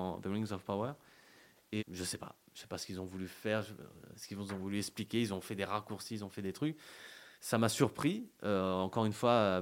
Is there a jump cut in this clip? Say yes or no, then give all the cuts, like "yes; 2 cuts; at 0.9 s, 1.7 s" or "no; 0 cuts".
yes; 2 cuts; at 1.8 s, 7.3 s